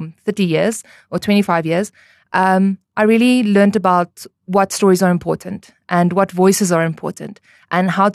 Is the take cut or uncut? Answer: uncut